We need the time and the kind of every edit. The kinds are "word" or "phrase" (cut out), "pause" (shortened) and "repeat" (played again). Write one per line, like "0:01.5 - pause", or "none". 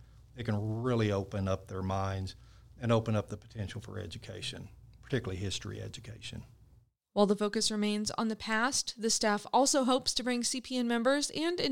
none